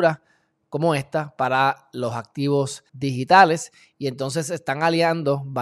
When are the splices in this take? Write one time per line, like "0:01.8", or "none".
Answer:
0:02.9